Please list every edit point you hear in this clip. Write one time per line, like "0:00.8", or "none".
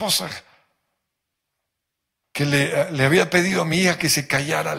none